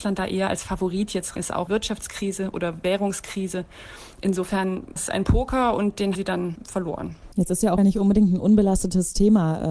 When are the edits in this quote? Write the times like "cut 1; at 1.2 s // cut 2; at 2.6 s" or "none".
cut 1; at 1.4 s // cut 2; at 1.7 s // cut 3; at 5.0 s // cut 4; at 6.1 s // cut 5; at 7.8 s

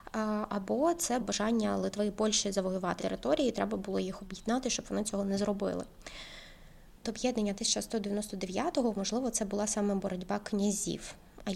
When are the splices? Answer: cut 1; at 1.2 s // cut 2; at 3.0 s // cut 3; at 7.0 s

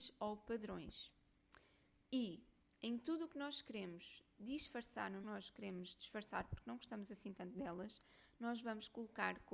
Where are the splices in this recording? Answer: cut 1; at 5.2 s

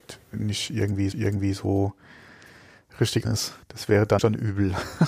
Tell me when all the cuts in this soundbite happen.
cut 1; at 1.1 s // cut 2; at 3.2 s // cut 3; at 3.6 s // cut 4; at 4.2 s

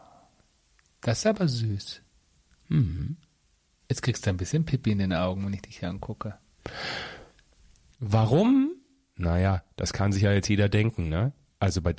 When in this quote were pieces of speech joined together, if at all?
none

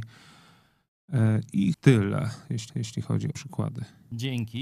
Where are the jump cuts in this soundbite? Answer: cut 1; at 1.7 s // cut 2; at 2.7 s // cut 3; at 3.3 s

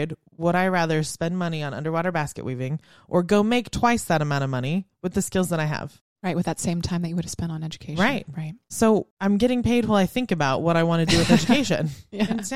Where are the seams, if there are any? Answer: cut 1; at 9.1 s

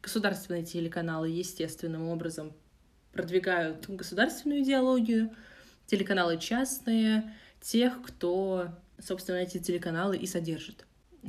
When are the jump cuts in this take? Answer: none

